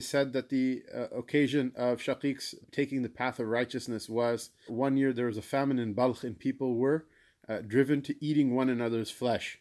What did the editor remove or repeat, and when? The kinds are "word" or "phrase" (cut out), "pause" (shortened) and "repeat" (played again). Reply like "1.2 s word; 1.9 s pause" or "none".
2.6 s word; 4.7 s word